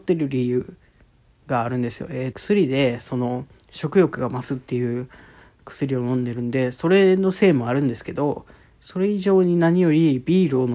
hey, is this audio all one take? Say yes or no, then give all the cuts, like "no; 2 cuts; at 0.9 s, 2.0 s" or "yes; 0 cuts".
no; 1 cut; at 2.3 s